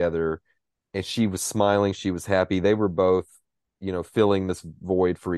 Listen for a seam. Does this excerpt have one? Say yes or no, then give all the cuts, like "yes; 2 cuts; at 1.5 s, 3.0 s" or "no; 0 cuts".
no; 0 cuts